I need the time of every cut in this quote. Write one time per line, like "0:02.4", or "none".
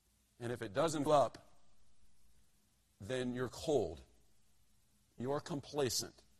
0:01.1
0:05.2